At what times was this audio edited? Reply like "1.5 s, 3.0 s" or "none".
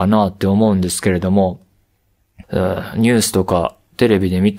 2.4 s